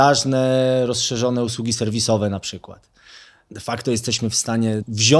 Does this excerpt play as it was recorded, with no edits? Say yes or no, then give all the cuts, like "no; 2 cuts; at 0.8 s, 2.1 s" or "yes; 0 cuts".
yes; 0 cuts